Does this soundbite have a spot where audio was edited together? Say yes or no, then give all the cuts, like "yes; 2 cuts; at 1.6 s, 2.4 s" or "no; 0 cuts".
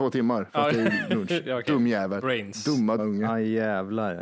yes; 1 cut; at 3.0 s